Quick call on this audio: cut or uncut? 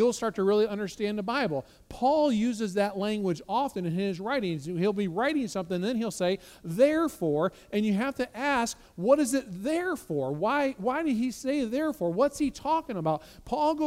uncut